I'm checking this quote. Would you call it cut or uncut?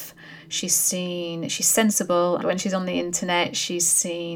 cut